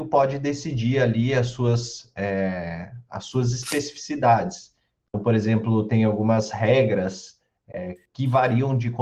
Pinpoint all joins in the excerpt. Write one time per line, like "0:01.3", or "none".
none